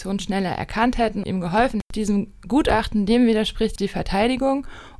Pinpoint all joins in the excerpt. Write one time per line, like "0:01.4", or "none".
0:01.2
0:01.9
0:03.8